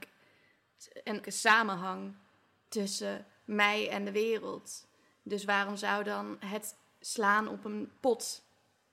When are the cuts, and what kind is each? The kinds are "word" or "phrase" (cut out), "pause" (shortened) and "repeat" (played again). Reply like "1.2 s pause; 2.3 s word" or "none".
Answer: 1.2 s word